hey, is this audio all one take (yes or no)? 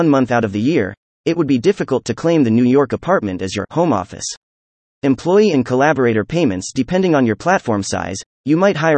yes